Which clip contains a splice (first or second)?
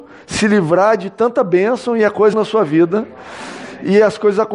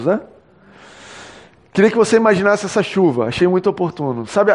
first